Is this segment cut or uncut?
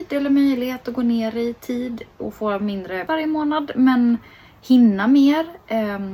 cut